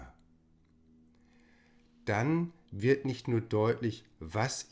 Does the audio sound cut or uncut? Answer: uncut